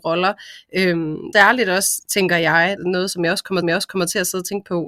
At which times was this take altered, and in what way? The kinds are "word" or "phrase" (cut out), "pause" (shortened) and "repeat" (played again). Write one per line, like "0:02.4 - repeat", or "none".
0:01.3 - word
0:02.8 - word
0:03.6 - repeat

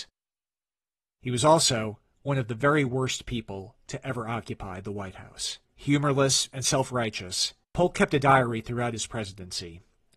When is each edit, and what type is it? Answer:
0:05.6 - pause
0:07.6 - pause

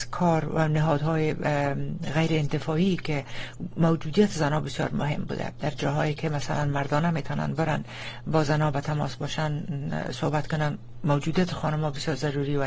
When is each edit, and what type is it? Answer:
none

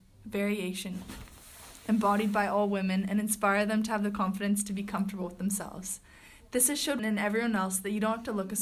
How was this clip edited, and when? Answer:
0:07.0 - word

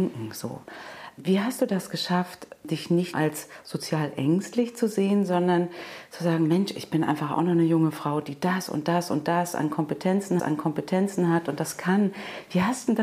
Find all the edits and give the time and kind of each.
0:03.1 - word
0:10.4 - repeat

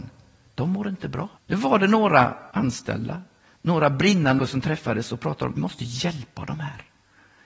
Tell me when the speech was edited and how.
0:01.4 - pause
0:02.5 - pause
0:04.4 - word
0:05.6 - word

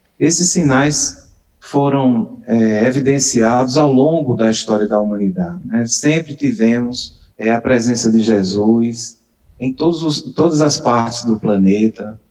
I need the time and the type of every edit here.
0:07.3 - pause

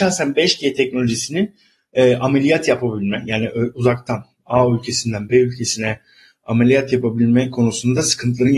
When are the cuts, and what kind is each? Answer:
none

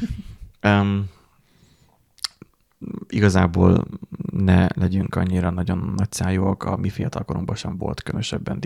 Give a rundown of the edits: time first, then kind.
none

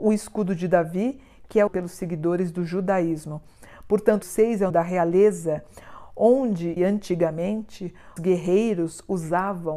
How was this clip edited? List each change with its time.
0:01.7 - word
0:04.2 - word
0:04.7 - word
0:06.8 - word
0:08.2 - word

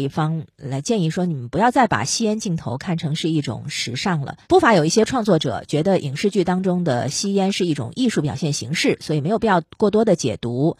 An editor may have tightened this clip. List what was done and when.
0:04.4 - pause

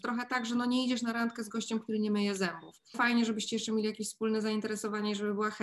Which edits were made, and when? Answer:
0:02.9 - word

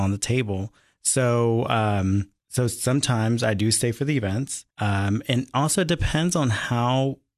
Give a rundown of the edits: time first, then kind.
0:02.4 - pause
0:04.7 - pause

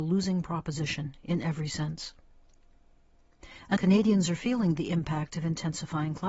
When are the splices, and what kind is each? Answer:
0:03.8 - word

